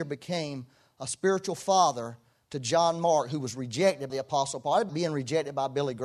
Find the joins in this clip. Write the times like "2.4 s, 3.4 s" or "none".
4.1 s, 4.9 s